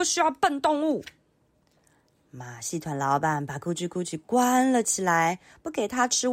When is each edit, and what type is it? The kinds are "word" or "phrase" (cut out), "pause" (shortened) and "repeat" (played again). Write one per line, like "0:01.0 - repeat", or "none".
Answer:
none